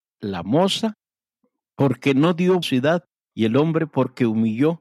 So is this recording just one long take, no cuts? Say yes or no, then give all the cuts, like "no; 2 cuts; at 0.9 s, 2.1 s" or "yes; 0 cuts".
no; 1 cut; at 2.6 s